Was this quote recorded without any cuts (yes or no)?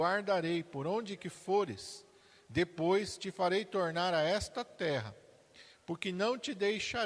no